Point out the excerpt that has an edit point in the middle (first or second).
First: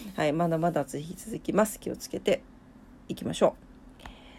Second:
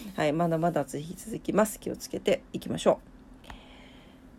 second